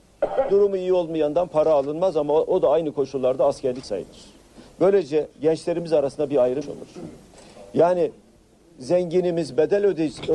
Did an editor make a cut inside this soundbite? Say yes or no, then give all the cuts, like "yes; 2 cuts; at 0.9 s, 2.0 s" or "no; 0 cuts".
yes; 2 cuts; at 3.8 s, 6.6 s